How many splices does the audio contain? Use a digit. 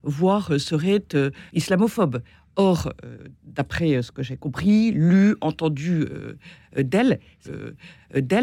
2